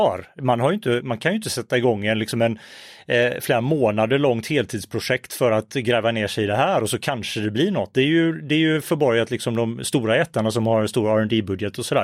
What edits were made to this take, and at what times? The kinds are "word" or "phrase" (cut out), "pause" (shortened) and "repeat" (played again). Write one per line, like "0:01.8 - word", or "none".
0:01.0 - word